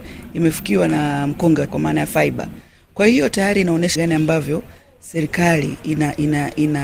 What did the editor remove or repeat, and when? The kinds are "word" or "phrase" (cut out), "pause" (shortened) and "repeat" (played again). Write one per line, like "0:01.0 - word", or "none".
0:01.7 - word
0:04.0 - word